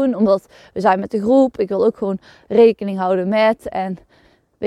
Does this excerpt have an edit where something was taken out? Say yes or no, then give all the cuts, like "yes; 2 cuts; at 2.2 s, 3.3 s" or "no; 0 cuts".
no; 0 cuts